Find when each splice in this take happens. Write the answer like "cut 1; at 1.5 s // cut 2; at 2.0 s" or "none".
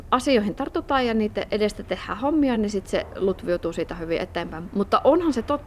none